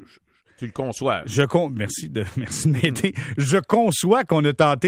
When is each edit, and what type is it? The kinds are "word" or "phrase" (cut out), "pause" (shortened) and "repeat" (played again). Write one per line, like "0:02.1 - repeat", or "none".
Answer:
none

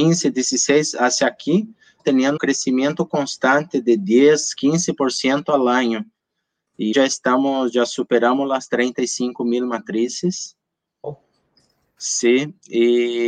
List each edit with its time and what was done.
0:02.0 - word
0:02.4 - word
0:06.9 - word

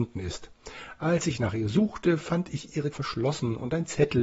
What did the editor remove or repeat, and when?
0:02.9 - word

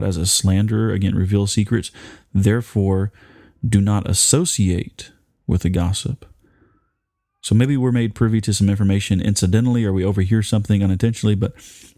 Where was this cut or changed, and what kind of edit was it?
none

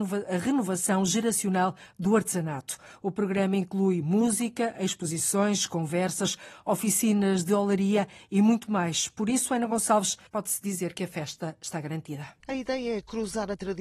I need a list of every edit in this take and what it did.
0:10.3 - pause
0:12.4 - pause

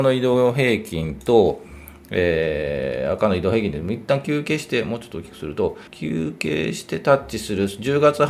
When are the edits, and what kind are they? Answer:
0:05.9 - pause

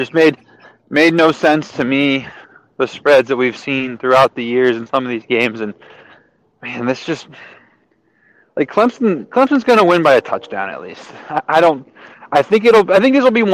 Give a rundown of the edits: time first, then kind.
none

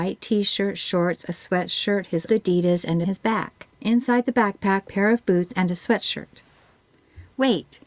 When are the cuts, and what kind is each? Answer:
0:02.3 - word
0:03.0 - phrase
0:03.7 - pause
0:04.8 - phrase

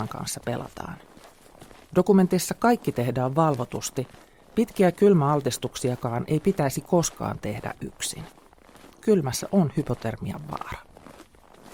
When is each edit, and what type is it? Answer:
none

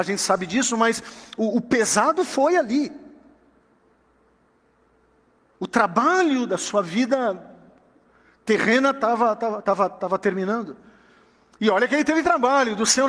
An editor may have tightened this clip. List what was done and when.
none

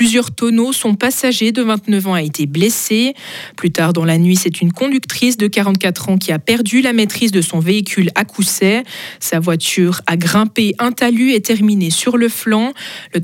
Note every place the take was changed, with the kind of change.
none

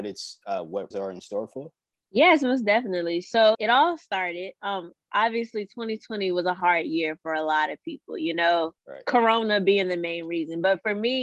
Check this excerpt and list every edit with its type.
0:00.9 - word
0:01.9 - pause
0:03.5 - word
0:08.8 - pause

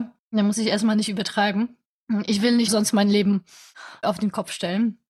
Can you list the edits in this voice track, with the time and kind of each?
0:02.7 - word
0:04.0 - word

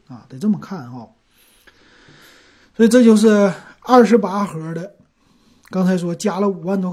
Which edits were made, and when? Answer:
none

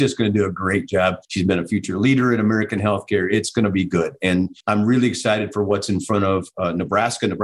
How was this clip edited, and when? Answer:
0:01.2 - pause
0:04.6 - pause

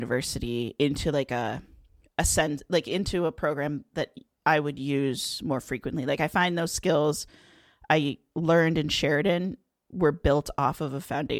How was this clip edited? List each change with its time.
none

